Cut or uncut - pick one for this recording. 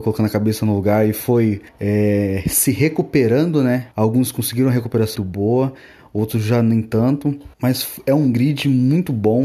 cut